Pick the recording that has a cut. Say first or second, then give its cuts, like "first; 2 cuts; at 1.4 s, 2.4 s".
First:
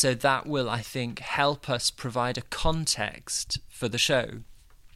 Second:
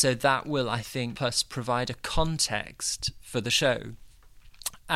second; 1 cut; at 1.1 s